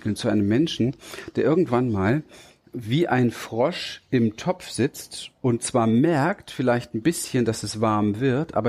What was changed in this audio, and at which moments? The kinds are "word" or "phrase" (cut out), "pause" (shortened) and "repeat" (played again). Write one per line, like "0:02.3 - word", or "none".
none